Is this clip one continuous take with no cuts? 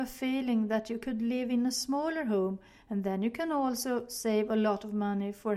yes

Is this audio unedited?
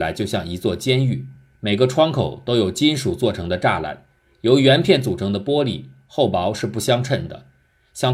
yes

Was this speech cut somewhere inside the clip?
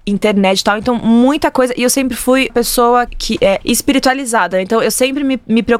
yes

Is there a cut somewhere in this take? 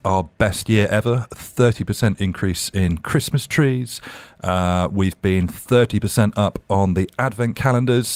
no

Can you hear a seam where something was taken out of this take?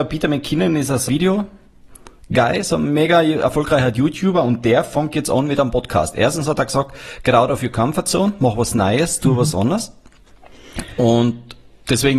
yes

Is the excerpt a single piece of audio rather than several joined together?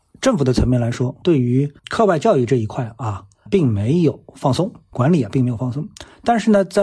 no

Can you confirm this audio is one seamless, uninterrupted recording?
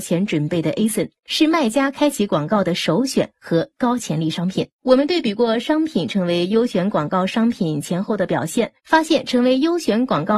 no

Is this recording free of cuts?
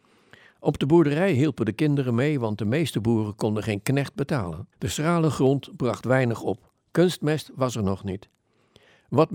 no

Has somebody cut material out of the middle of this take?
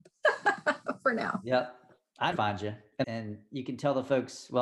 yes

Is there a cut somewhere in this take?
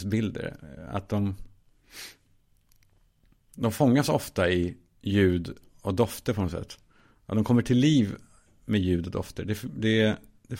no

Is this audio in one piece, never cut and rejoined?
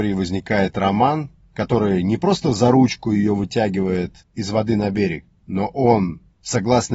yes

